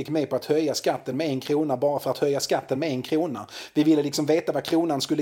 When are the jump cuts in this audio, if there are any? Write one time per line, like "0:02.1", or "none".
none